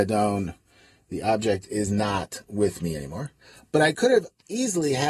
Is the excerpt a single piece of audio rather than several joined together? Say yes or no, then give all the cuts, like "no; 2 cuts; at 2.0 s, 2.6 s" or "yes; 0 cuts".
yes; 0 cuts